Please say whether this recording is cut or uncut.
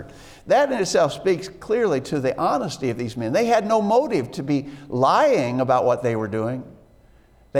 uncut